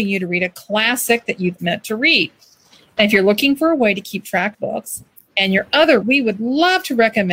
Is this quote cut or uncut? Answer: cut